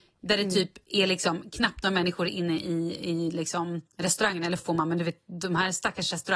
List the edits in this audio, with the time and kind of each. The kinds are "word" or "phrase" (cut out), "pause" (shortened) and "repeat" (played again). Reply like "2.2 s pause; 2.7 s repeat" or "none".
3.9 s pause; 4.6 s word